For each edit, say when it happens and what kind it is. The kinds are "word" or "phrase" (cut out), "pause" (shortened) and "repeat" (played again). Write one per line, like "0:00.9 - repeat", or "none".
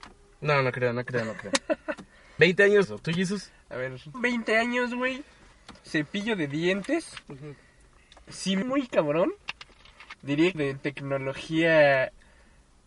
0:02.4 - word
0:02.8 - phrase
0:04.1 - word
0:05.8 - pause
0:07.2 - pause
0:08.0 - pause
0:08.6 - phrase
0:10.5 - phrase